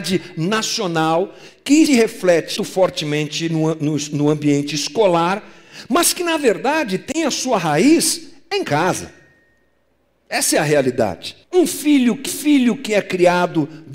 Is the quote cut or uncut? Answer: cut